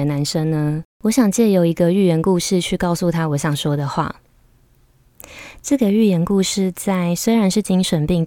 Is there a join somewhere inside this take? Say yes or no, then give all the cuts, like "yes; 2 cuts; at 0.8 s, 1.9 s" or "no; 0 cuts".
yes; 1 cut; at 0.9 s